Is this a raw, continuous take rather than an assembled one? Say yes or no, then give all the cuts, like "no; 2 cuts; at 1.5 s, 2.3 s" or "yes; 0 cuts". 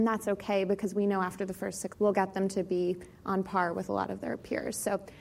no; 1 cut; at 1.9 s